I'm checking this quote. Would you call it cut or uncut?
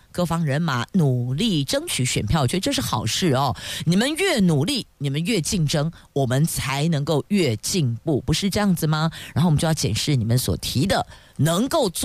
uncut